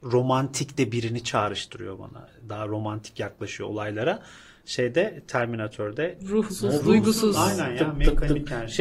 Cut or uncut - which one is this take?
uncut